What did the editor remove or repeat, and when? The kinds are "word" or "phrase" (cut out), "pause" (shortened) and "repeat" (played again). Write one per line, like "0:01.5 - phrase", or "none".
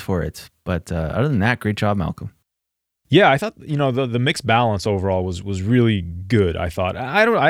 none